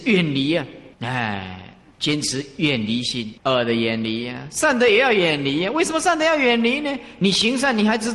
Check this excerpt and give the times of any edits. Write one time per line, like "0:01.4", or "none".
0:00.9
0:03.4